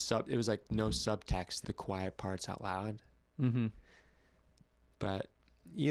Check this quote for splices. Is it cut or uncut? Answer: cut